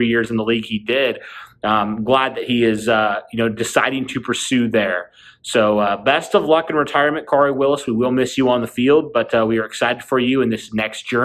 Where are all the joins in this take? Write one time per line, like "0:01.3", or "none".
none